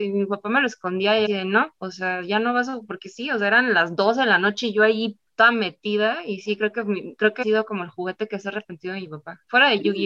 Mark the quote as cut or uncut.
cut